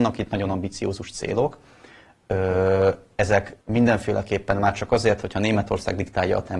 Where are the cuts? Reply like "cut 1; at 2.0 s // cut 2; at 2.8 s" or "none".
cut 1; at 3.6 s

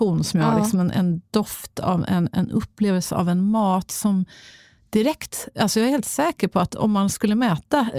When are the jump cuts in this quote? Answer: none

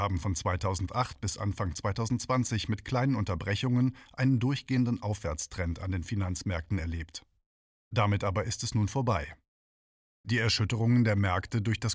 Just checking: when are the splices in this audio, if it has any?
none

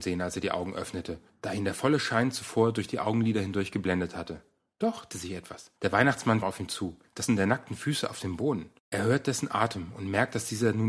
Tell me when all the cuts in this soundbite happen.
cut 1; at 5.1 s // cut 2; at 6.4 s // cut 3; at 7.3 s // cut 4; at 8.8 s

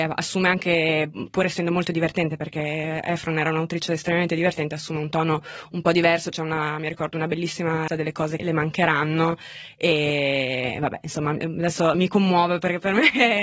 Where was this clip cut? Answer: cut 1; at 7.9 s // cut 2; at 8.4 s // cut 3; at 11.9 s

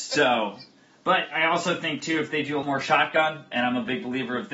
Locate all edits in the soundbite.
cut 1; at 1.3 s // cut 2; at 2.6 s // cut 3; at 3.5 s

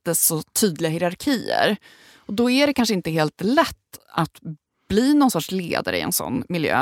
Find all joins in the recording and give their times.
none

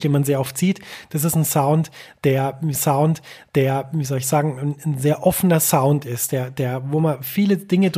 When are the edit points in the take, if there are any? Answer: cut 1; at 2.7 s

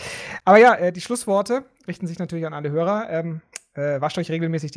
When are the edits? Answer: none

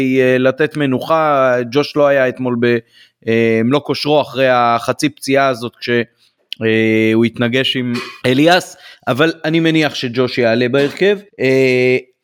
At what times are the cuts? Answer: cut 1; at 8.2 s // cut 2; at 11.3 s

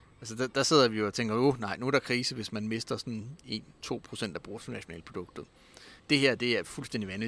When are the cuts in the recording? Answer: cut 1; at 6.0 s

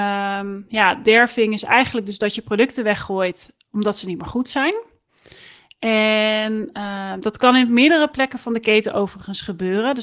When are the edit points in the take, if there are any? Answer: none

